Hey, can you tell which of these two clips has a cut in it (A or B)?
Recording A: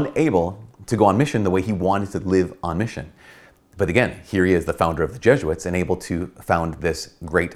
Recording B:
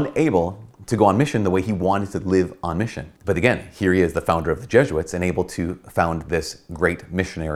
B